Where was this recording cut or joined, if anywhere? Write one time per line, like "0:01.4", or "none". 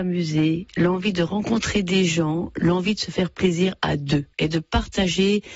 0:04.3